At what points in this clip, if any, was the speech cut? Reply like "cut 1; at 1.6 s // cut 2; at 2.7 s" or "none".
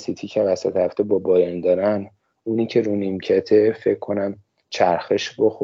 none

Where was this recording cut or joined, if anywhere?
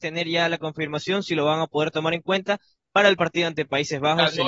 none

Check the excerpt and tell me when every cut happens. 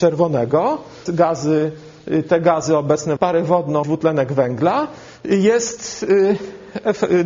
cut 1; at 1.1 s // cut 2; at 3.2 s // cut 3; at 3.8 s

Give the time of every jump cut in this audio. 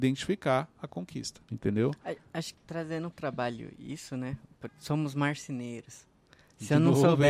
cut 1; at 1.4 s // cut 2; at 2.5 s // cut 3; at 3.1 s // cut 4; at 4.7 s

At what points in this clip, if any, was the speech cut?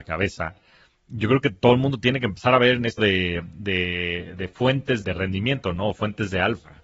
cut 1; at 3.0 s // cut 2; at 5.0 s

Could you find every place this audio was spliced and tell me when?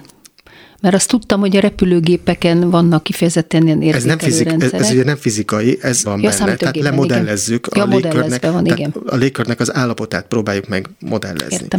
cut 1; at 6.0 s

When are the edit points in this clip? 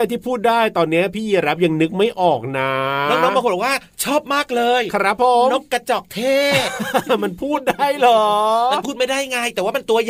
none

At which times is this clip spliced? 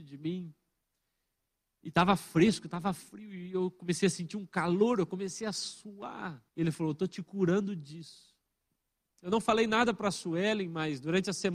cut 1; at 6.5 s // cut 2; at 8.8 s

